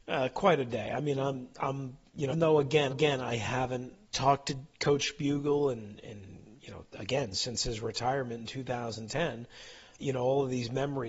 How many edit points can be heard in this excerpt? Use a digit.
5